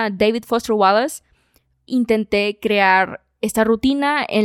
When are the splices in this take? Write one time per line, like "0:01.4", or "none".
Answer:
0:01.9